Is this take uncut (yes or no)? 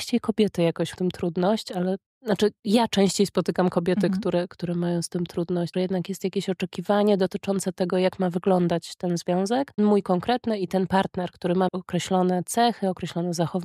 no